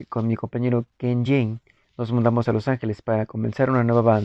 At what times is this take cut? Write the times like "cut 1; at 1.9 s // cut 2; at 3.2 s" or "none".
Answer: none